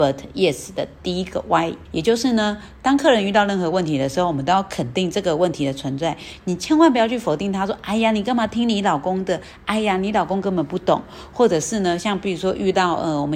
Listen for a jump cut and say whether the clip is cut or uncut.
cut